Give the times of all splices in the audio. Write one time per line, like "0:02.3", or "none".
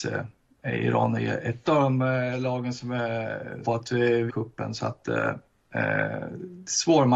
0:01.6
0:03.6
0:04.3

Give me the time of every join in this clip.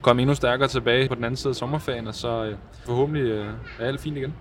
0:01.1
0:02.9

